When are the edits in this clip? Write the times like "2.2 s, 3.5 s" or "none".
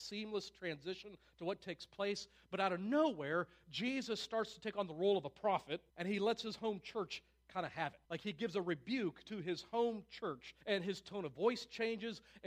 5.9 s, 8.0 s, 10.6 s